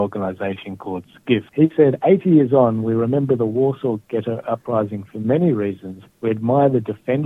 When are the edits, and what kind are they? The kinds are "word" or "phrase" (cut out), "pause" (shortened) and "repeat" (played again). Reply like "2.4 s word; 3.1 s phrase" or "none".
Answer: 1.5 s pause; 6.1 s pause

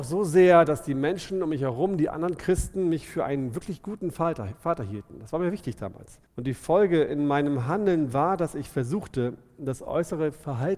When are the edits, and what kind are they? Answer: 6.3 s pause

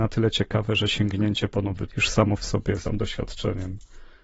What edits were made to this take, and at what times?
1.9 s word; 2.8 s word

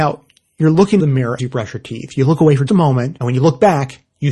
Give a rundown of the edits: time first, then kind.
1.0 s word; 1.4 s word; 2.7 s word; 3.2 s word

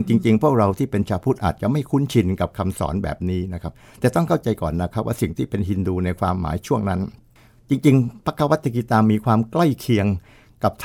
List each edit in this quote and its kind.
7.4 s pause

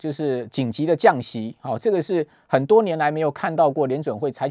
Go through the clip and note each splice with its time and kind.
none

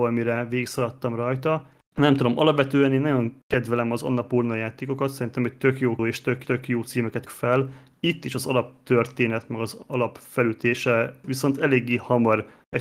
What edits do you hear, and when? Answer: 6.0 s word; 6.4 s repeat; 7.3 s word; 11.2 s phrase

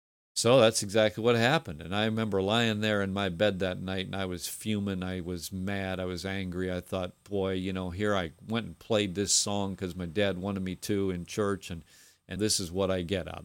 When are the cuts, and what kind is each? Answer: 12.4 s word

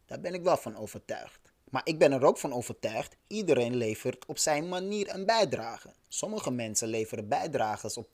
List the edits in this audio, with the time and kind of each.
1.6 s pause; 3.2 s pause; 6.0 s pause

